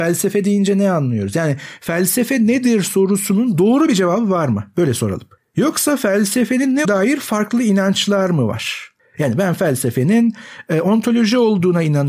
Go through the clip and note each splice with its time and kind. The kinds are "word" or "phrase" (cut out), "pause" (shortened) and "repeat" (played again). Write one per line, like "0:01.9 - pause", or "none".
0:06.8 - word